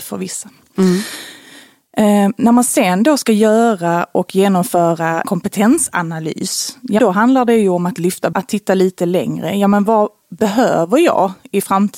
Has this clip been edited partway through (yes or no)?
yes